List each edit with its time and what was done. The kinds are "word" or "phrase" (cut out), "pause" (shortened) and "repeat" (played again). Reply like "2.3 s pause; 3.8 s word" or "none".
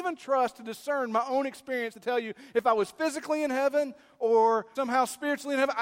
1.9 s word; 4.7 s word